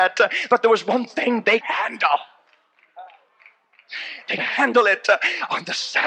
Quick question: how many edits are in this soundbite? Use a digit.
2